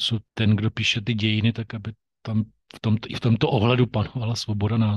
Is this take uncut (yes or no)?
yes